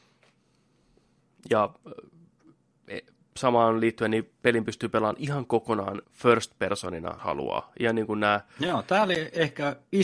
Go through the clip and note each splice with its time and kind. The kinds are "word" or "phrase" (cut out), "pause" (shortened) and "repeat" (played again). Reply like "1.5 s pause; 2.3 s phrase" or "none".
6.0 s pause; 7.2 s word